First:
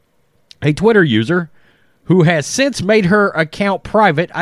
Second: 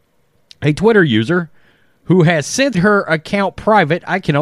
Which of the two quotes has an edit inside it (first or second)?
second